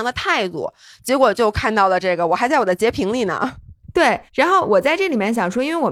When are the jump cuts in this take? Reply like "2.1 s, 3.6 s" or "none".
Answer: 4.3 s